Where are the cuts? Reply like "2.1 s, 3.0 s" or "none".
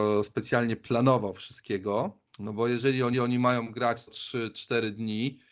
2.3 s, 3.1 s, 4.1 s